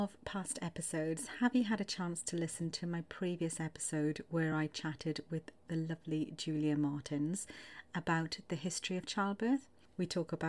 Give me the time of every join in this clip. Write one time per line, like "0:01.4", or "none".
none